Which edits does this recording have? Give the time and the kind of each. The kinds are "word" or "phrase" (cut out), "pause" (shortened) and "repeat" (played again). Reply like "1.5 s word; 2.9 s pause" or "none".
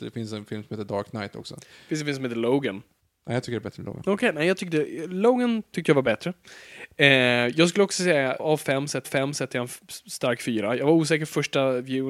3.0 s pause; 8.4 s word; 9.0 s repeat